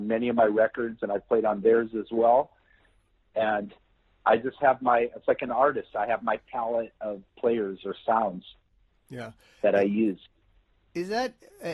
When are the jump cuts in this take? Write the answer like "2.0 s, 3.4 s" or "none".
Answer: none